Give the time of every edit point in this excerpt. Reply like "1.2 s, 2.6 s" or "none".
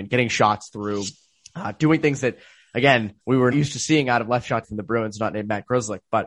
1.2 s, 3.2 s, 3.5 s, 4.6 s